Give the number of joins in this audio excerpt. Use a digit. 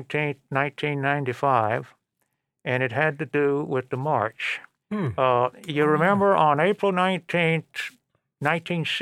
1